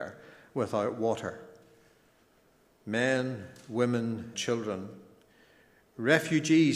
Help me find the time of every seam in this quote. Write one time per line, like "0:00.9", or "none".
0:04.3